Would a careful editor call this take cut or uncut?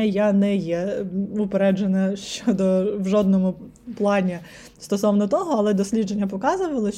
uncut